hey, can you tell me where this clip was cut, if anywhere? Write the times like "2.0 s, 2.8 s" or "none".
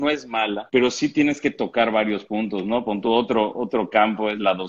none